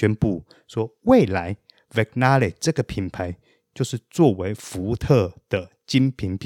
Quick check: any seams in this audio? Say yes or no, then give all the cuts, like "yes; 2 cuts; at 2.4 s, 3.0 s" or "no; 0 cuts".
no; 0 cuts